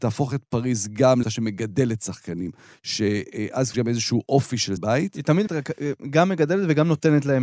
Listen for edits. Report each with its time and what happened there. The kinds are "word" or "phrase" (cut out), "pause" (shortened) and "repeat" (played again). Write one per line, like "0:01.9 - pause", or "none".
0:01.2 - word
0:03.7 - word
0:04.8 - word
0:05.5 - word